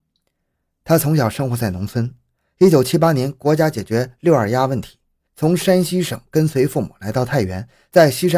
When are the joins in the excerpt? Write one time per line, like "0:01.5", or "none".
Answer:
none